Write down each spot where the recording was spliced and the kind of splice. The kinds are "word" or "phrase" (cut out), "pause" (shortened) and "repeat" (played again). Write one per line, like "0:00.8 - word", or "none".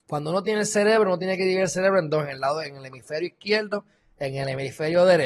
none